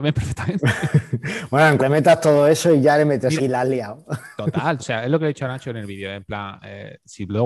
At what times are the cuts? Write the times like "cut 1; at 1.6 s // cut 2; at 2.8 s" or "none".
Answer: cut 1; at 1.8 s // cut 2; at 3.4 s // cut 3; at 4.8 s

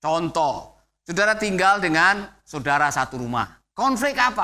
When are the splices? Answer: none

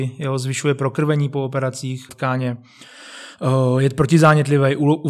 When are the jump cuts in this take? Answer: cut 1; at 2.1 s

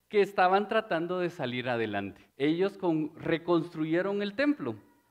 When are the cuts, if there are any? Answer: cut 1; at 2.3 s

